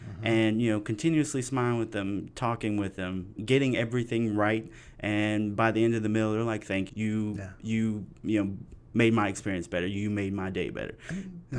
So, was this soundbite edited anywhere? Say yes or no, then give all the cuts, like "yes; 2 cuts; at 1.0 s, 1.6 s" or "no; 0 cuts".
yes; 2 cuts; at 3.4 s, 6.9 s